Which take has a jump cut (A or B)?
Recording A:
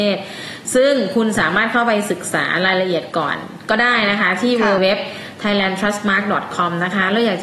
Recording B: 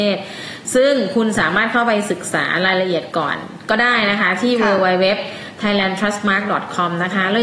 A